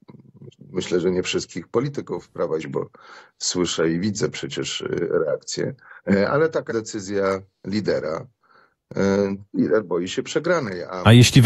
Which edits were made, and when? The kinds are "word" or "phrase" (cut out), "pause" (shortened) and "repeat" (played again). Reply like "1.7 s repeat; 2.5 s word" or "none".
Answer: 2.6 s phrase; 6.0 s pause; 6.7 s word

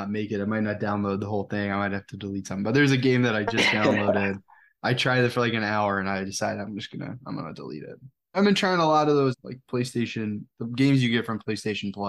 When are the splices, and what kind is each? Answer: none

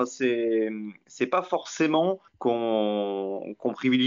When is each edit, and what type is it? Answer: 2.3 s pause

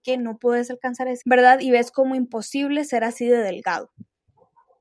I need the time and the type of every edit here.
1.2 s word

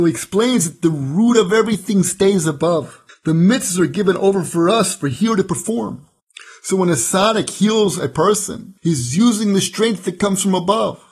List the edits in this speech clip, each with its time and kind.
3.1 s pause; 8.8 s pause

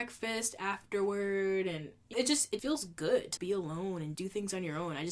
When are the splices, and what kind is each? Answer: 2.1 s word; 2.6 s word; 3.4 s word; 4.1 s word

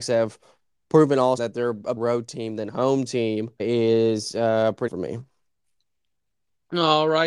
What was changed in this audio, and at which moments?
1.4 s word; 2.0 s word; 3.6 s word; 4.9 s word

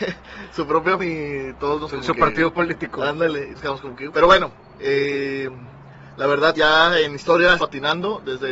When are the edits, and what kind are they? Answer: 1.0 s word; 1.9 s word; 3.5 s word; 4.1 s word; 6.5 s word; 7.6 s word

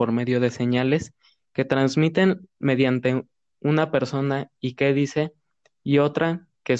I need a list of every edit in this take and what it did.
none

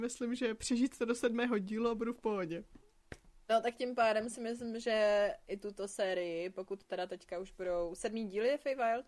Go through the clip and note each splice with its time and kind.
none

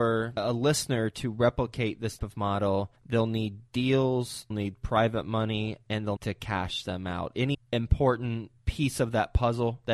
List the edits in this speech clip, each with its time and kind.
2.2 s word; 3.0 s pause; 4.5 s word; 6.2 s phrase; 7.5 s phrase; 8.6 s pause

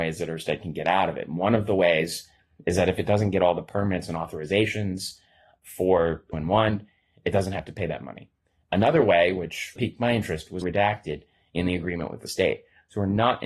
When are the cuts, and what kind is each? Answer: 6.3 s word; 9.8 s word; 10.6 s word

